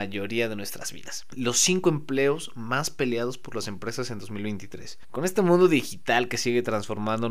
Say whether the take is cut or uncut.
uncut